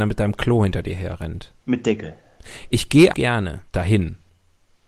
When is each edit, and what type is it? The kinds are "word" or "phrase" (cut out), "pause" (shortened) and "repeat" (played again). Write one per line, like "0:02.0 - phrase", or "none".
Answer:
0:01.6 - pause
0:03.1 - phrase
0:03.7 - pause